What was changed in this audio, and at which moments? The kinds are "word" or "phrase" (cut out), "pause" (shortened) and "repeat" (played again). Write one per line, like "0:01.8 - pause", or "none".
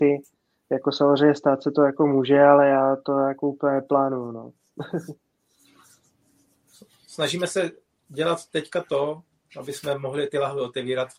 none